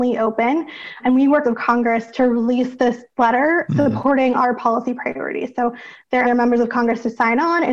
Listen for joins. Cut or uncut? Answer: cut